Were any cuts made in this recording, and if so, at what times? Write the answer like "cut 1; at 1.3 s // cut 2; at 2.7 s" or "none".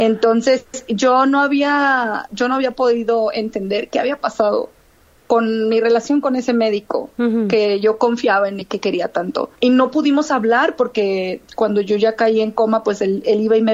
cut 1; at 8.6 s